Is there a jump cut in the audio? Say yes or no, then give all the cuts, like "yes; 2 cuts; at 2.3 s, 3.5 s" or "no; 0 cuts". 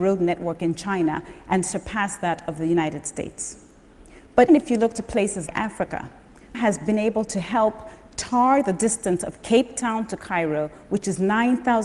yes; 3 cuts; at 4.5 s, 5.5 s, 6.5 s